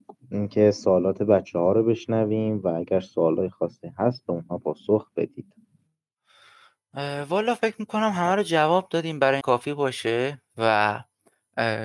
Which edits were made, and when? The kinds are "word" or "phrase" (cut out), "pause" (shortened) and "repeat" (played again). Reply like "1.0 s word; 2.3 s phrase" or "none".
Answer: 9.4 s phrase